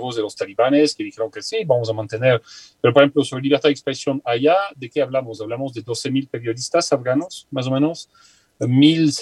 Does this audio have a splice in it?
no; 0 cuts

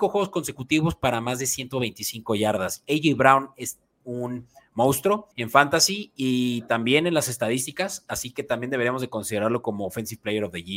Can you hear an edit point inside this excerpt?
yes; 1 cut; at 5.3 s

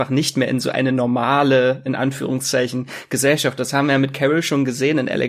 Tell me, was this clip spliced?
no; 0 cuts

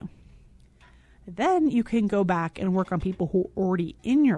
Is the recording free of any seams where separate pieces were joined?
yes; 0 cuts

